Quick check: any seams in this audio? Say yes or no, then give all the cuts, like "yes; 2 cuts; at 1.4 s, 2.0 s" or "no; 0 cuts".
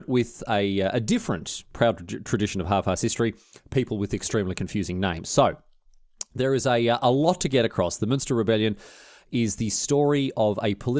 no; 0 cuts